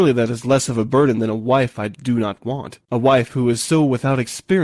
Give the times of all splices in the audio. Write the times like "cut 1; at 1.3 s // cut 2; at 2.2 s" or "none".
cut 1; at 2.8 s

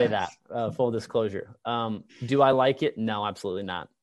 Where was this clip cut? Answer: none

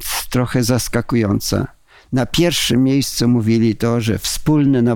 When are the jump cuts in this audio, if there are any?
none

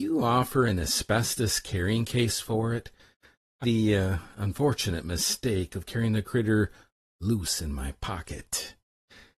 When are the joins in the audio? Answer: cut 1; at 3.6 s

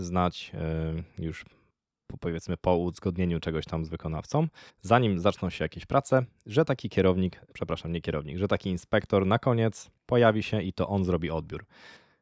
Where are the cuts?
cut 1; at 4.7 s // cut 2; at 7.5 s // cut 3; at 10.0 s

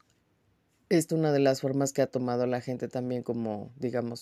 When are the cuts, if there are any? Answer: cut 1; at 1.1 s

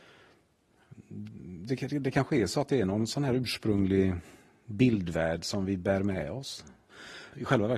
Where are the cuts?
none

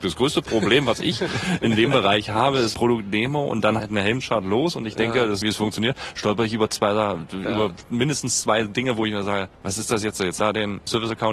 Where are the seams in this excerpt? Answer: cut 1; at 2.7 s // cut 2; at 3.8 s // cut 3; at 5.4 s // cut 4; at 9.5 s // cut 5; at 10.4 s

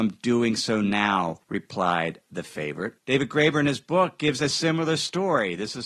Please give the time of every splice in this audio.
cut 1; at 1.4 s // cut 2; at 3.0 s

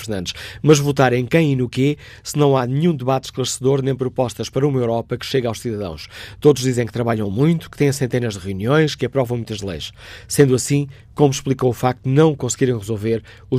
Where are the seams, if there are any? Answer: none

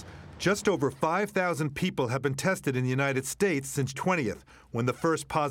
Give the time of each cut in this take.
cut 1; at 3.9 s

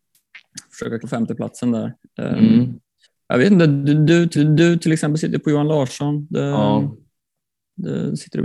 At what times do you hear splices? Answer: cut 1; at 1.0 s // cut 2; at 3.0 s // cut 3; at 4.3 s

